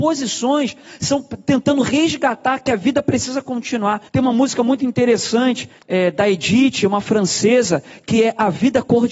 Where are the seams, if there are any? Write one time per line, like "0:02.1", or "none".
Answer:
0:04.1
0:05.8